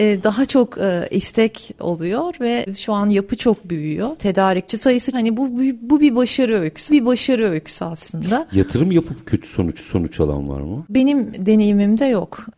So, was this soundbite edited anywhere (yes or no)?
yes